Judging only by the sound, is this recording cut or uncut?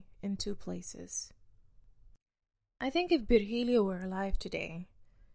uncut